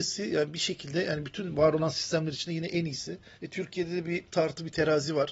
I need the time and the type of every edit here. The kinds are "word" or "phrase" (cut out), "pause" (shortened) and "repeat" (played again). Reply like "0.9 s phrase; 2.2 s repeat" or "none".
3.3 s pause; 4.3 s pause